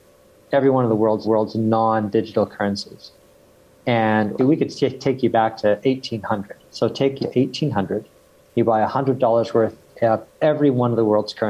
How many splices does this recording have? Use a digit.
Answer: 3